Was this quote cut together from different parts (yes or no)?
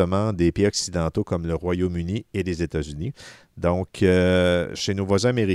no